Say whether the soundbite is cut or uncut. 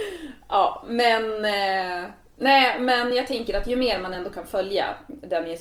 uncut